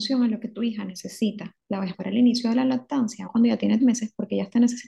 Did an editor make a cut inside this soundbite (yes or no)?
yes